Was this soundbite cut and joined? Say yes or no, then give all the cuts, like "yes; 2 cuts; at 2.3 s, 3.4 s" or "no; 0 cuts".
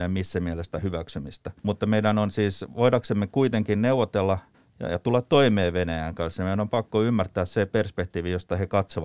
yes; 2 cuts; at 1.6 s, 4.5 s